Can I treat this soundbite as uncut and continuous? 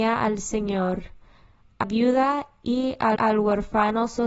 no; 2 cuts; at 1.8 s, 3.2 s

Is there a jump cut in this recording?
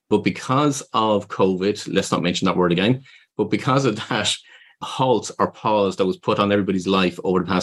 no; 0 cuts

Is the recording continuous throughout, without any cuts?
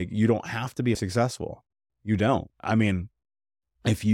no; 1 cut; at 0.9 s

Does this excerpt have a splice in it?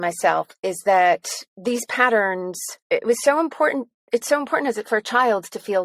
yes; 2 cuts; at 1.5 s, 2.8 s

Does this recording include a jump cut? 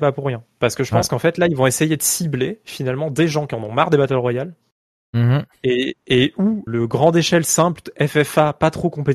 yes; 1 cut; at 6.7 s

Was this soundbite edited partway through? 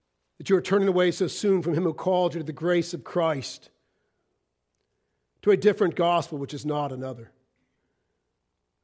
no; 0 cuts

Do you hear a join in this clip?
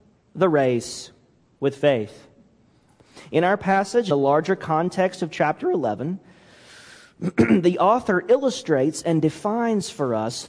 yes; 1 cut; at 4.1 s

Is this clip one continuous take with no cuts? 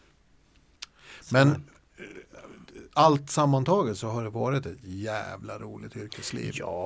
yes; 0 cuts

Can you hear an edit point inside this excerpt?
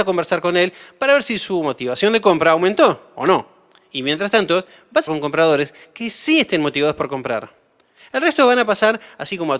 yes; 1 cut; at 5.1 s

